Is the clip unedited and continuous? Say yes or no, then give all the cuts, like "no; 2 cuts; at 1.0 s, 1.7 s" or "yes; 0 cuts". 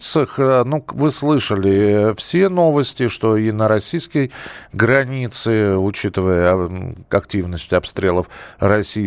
yes; 0 cuts